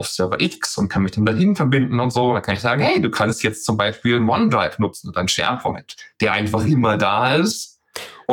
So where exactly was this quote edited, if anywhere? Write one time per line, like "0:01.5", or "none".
none